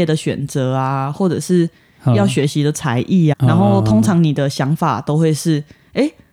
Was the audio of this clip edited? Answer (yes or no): yes